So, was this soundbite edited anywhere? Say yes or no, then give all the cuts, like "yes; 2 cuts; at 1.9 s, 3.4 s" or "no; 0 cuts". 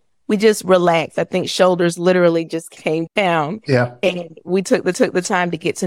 yes; 1 cut; at 4.9 s